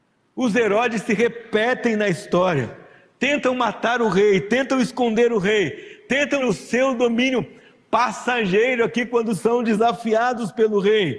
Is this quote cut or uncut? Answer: cut